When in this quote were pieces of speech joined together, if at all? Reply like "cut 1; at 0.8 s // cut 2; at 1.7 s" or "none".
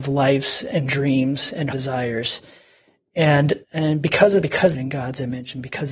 cut 1; at 1.7 s // cut 2; at 3.6 s // cut 3; at 4.4 s // cut 4; at 4.7 s

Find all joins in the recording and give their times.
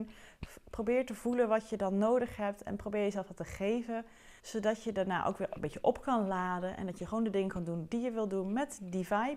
cut 1; at 4.4 s

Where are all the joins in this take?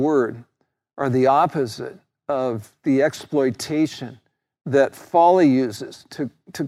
none

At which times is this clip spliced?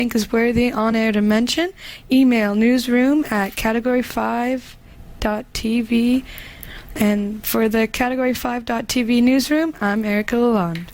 none

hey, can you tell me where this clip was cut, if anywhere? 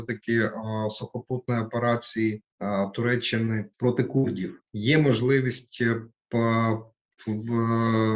cut 1; at 2.5 s // cut 2; at 3.7 s // cut 3; at 4.7 s

